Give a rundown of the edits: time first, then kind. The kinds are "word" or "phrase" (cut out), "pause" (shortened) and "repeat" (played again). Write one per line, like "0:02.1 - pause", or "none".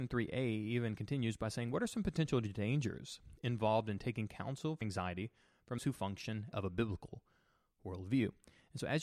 0:04.8 - word
0:05.8 - word
0:06.5 - word